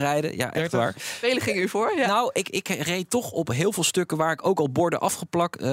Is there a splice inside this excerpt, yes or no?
no